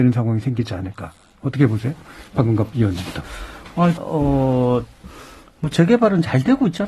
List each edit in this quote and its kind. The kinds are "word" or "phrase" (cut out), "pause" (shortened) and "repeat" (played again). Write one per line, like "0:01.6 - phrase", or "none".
0:04.0 - word
0:05.7 - word